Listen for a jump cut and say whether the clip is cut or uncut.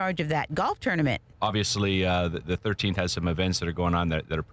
uncut